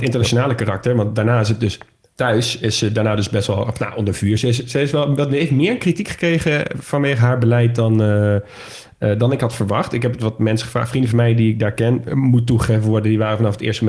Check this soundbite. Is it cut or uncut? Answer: uncut